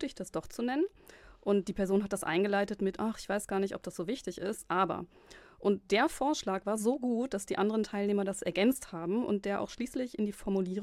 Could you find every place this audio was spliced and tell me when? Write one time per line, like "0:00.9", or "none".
none